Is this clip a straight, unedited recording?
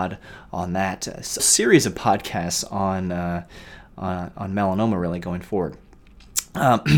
no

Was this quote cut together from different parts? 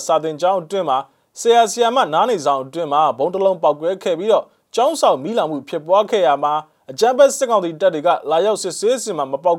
no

